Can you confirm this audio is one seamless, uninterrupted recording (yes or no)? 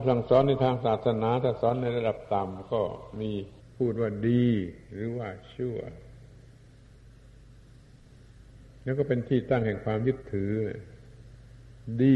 no